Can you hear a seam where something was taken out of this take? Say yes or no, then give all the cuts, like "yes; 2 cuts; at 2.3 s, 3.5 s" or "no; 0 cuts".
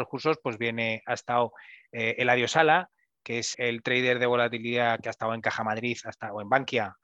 yes; 1 cut; at 3.5 s